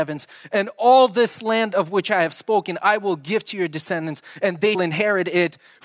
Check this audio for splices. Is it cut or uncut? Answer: cut